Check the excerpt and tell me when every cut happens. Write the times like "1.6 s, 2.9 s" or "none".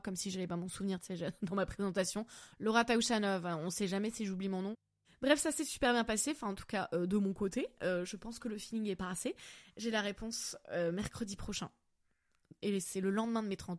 none